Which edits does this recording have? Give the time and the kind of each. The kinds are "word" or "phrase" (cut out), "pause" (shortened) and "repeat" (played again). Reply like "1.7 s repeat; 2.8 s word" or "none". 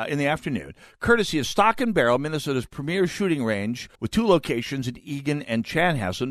4.0 s pause